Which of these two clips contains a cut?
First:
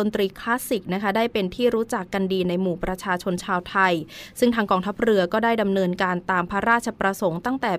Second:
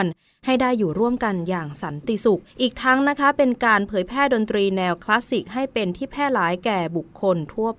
second; 1 cut; at 2.5 s

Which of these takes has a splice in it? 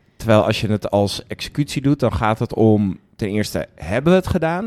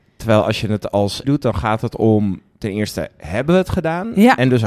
second; 1 cut; at 1.2 s

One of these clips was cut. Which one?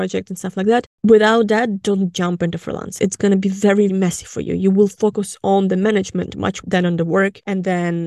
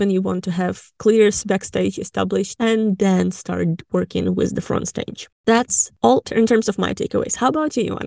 first; 3 cuts; at 3.0 s, 3.9 s, 6.6 s

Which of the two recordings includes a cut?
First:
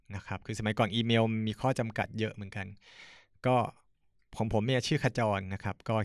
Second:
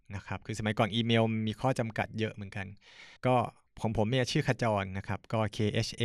second; 2 cuts; at 3.2 s, 3.7 s

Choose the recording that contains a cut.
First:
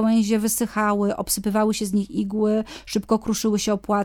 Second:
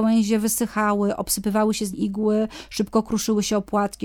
second; 1 cut; at 1.9 s

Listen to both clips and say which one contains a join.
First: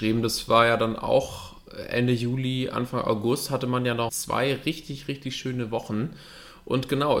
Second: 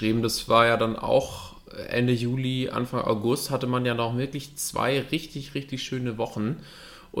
first; 1 cut; at 4.1 s

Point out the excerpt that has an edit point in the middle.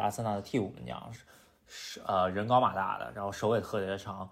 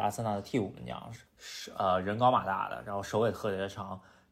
second; 1 cut; at 1.3 s

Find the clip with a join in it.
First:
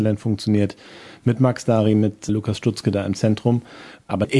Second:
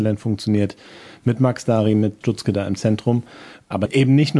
second; 1 cut; at 2.2 s

